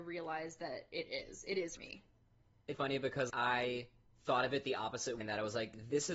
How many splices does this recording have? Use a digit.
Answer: 4